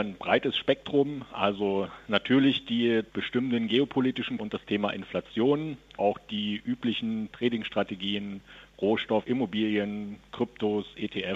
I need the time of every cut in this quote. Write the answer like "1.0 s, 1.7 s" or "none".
3.1 s, 4.4 s, 6.0 s, 7.3 s, 9.2 s